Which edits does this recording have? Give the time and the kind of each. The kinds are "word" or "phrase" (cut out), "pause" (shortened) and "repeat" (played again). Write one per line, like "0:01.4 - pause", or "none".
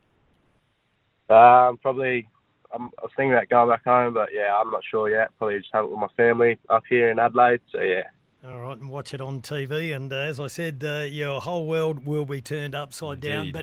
none